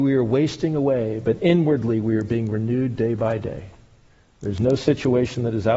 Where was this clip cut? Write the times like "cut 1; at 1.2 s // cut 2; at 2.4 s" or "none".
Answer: none